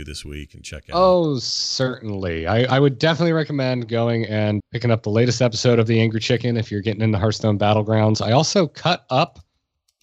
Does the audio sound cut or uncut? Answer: cut